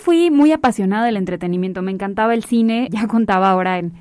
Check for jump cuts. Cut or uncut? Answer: cut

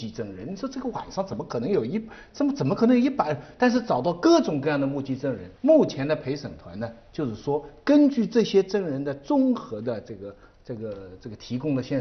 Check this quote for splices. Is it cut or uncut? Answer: cut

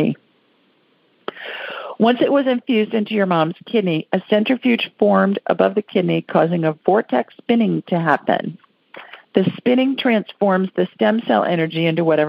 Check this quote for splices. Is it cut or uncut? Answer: cut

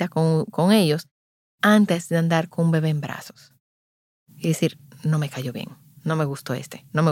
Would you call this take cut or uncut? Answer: uncut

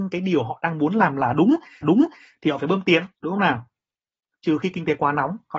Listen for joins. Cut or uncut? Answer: cut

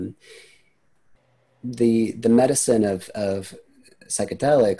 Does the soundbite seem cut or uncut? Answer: uncut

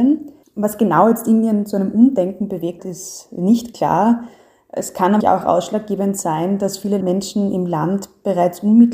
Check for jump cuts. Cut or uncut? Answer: cut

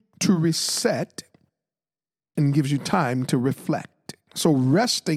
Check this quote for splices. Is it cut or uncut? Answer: uncut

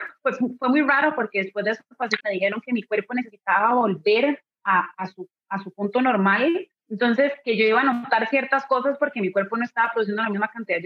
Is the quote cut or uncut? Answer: cut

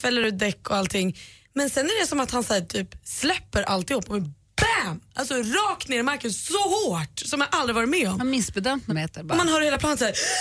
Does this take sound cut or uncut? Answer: cut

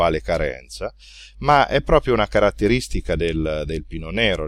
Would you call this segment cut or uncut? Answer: uncut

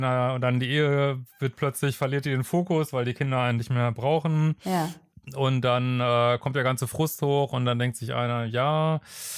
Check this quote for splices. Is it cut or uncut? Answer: uncut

